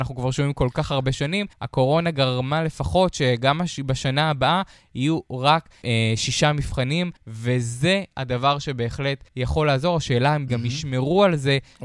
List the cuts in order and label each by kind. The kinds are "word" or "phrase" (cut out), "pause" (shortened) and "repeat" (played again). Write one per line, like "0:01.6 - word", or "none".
0:01.5 - pause
0:05.8 - word
0:07.2 - pause
0:09.3 - pause
0:10.5 - word